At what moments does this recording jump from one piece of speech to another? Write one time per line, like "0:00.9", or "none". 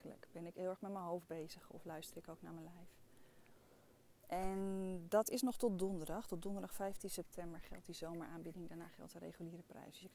none

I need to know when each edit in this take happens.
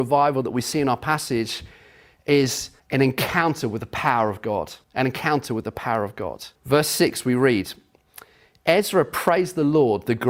0:02.8
0:04.8
0:06.6

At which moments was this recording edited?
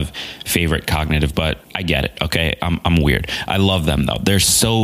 0:01.3
0:01.6

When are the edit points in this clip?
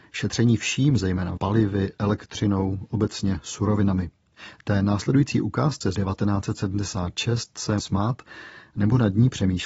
0:01.4
0:05.9
0:07.8

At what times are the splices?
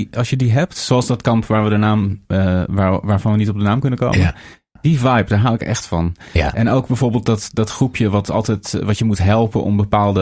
none

